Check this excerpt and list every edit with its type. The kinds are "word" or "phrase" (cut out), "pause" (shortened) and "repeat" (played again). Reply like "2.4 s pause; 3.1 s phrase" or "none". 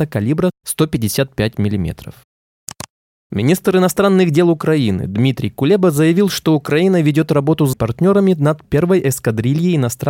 7.7 s word; 8.6 s word